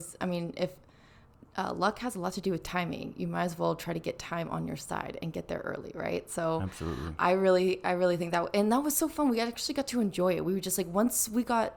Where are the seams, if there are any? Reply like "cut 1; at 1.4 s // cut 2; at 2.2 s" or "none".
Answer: none

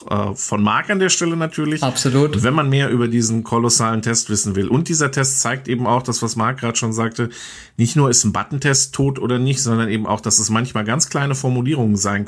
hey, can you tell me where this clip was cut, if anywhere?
none

